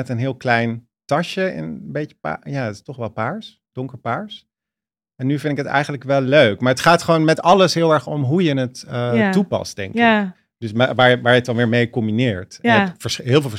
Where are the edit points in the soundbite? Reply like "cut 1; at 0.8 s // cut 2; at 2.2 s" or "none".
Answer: none